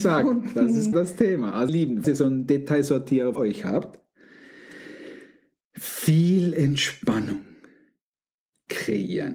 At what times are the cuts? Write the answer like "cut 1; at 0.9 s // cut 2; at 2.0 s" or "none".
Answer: cut 1; at 0.9 s // cut 2; at 1.7 s // cut 3; at 2.0 s // cut 4; at 3.4 s